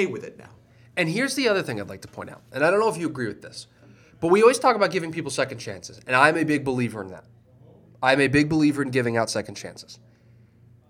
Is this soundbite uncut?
yes; 0 cuts

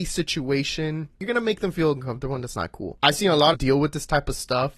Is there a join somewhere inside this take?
yes; 1 cut; at 3.5 s

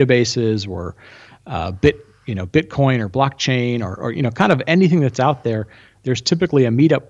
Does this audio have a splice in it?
no; 0 cuts

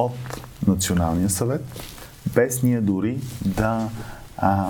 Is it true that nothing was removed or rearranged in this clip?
yes; 0 cuts

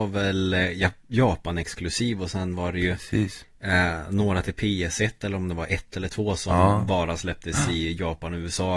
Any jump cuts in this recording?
no; 0 cuts

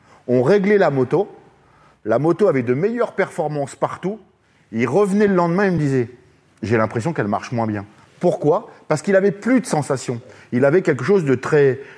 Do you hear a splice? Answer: no; 0 cuts

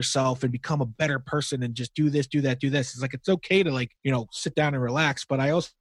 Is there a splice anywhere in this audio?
yes; 1 cut; at 4.0 s

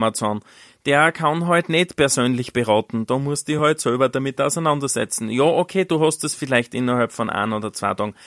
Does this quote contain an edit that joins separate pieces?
no; 0 cuts

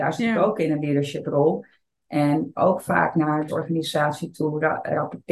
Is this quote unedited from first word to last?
no; 2 cuts; at 2.5 s, 3.5 s

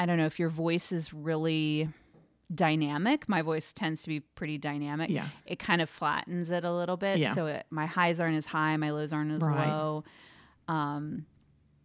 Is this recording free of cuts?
yes; 0 cuts

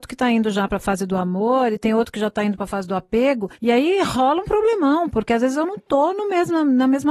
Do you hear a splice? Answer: no; 0 cuts

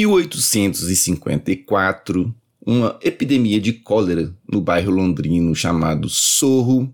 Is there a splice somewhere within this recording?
no; 0 cuts

